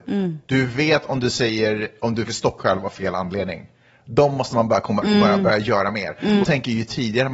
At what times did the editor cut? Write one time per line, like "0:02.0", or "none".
0:02.3
0:02.6
0:05.0
0:06.4

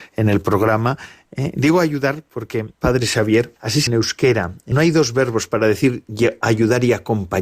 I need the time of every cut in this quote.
0:02.7
0:03.6
0:03.9
0:04.7

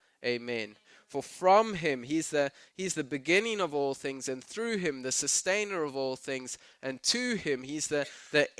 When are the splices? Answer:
none

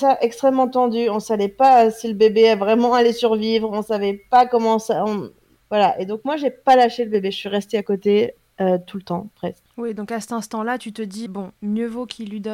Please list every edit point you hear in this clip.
0:05.6
0:09.7
0:11.3

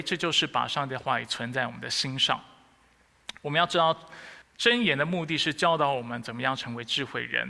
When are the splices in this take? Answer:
0:04.4

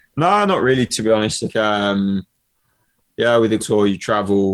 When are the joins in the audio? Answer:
0:01.5
0:03.6

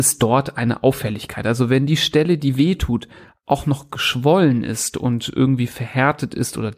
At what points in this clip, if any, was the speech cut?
none

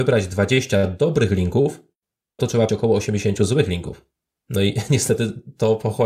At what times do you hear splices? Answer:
0:02.4
0:02.7

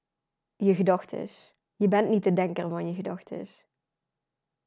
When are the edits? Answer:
0:01.6

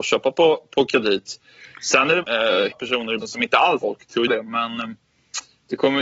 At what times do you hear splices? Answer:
0:02.2
0:02.7
0:03.2
0:03.8
0:04.3

